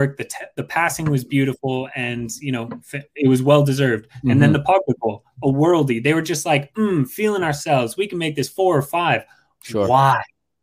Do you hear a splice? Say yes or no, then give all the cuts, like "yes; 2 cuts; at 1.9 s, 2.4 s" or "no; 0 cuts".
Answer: no; 0 cuts